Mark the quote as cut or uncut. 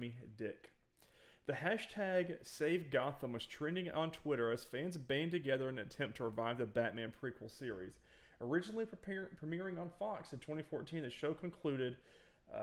uncut